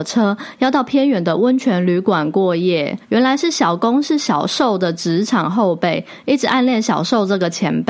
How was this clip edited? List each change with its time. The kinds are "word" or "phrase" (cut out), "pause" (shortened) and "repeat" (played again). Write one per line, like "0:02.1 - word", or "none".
0:03.0 - pause

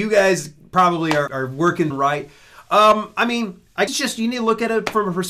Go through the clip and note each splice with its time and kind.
0:01.3 - word
0:01.9 - word
0:03.9 - word

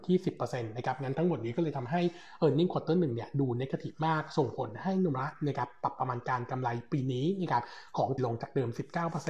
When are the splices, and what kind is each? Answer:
0:08.2 - word

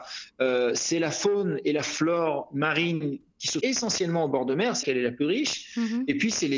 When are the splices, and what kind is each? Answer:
0:03.6 - word
0:04.8 - word

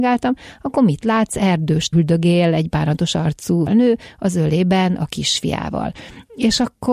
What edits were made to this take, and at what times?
0:01.9 - word
0:03.7 - word

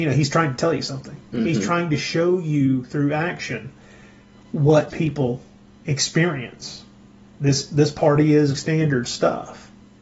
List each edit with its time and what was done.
0:04.9 - word
0:08.6 - word

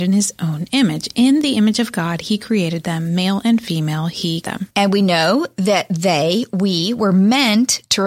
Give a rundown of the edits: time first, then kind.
0:04.4 - word

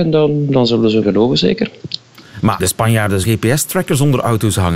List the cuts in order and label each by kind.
0:01.0 - word
0:02.6 - word
0:03.2 - word

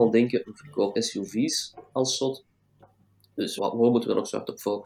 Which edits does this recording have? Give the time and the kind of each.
0:00.9 - word
0:03.6 - word

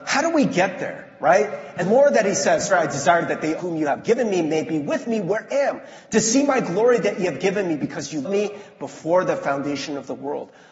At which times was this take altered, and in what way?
0:01.8 - word
0:02.7 - word
0:03.6 - word
0:05.5 - word
0:08.2 - word

